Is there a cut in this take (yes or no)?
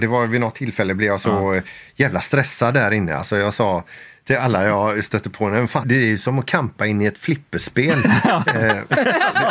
yes